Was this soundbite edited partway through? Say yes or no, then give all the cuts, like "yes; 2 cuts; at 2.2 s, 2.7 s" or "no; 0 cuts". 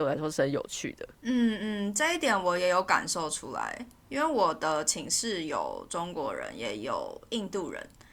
yes; 1 cut; at 1.1 s